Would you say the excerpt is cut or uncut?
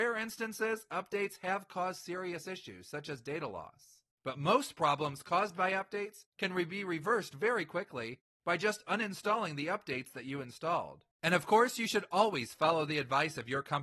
cut